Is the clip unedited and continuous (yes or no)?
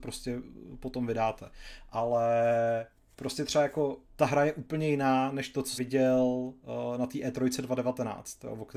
no